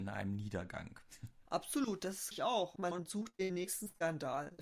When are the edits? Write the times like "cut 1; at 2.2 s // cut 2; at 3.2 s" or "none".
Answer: cut 1; at 2.3 s // cut 2; at 2.9 s